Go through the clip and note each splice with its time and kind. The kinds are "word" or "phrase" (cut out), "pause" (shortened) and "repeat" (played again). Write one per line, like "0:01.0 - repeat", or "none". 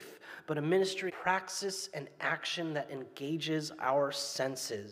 0:01.1 - word